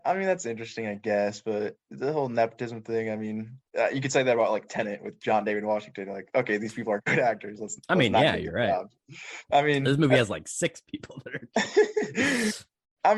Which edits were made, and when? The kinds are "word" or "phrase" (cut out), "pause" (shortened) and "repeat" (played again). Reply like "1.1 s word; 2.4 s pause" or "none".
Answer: 3.7 s pause

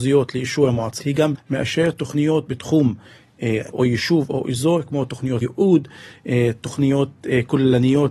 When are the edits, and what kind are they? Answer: 1.0 s word; 1.3 s word; 2.5 s word; 3.7 s word; 5.4 s word

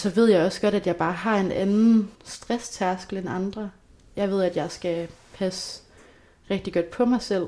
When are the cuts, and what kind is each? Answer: 2.2 s pause

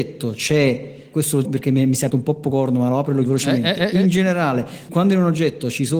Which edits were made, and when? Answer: 1.1 s word; 1.4 s word; 2.1 s word; 3.3 s word; 4.9 s word

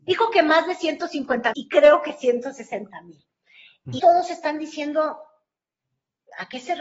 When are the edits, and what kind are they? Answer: 1.5 s word; 4.0 s word

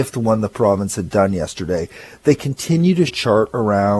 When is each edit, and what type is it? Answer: 3.1 s word

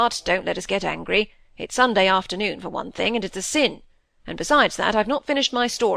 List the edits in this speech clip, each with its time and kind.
none

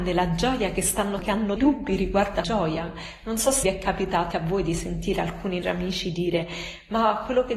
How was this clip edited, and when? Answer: 1.2 s word; 1.6 s word; 2.4 s word; 3.6 s word; 4.3 s word; 5.6 s word

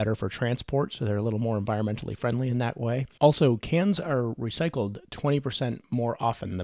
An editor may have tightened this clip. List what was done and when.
none

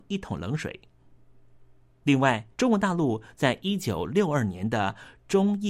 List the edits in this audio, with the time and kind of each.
2.5 s pause

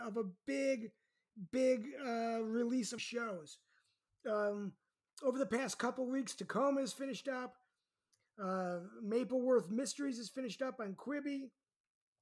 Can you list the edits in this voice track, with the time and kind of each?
3.0 s phrase

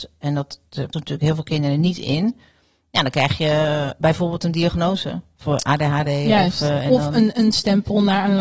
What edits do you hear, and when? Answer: 0.9 s word; 4.0 s word

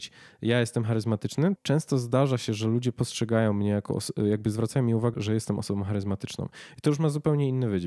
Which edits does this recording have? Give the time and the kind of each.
1.6 s word; 5.1 s word

